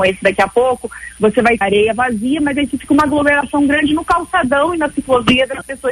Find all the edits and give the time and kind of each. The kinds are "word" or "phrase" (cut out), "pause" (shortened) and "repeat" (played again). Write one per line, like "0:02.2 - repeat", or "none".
0:01.6 - word